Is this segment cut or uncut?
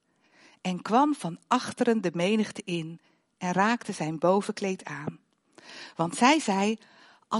uncut